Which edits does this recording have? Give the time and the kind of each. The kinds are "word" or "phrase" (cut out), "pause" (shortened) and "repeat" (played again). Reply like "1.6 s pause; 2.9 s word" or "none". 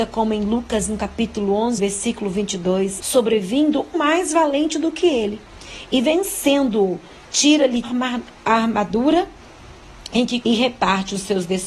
1.8 s word; 3.0 s word; 3.9 s word; 7.8 s word; 10.4 s word

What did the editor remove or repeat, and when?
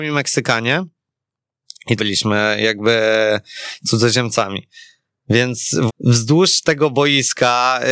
2.0 s phrase; 5.9 s word

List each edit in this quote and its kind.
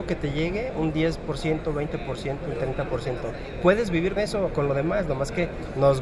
4.2 s word

